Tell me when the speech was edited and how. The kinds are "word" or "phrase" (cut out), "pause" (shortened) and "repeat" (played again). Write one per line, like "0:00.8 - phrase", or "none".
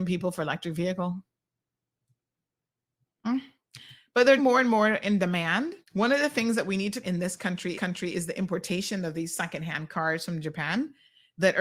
0:04.4 - word
0:05.8 - pause
0:07.0 - phrase
0:07.7 - repeat